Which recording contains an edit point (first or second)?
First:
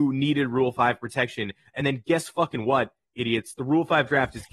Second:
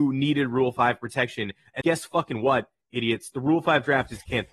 second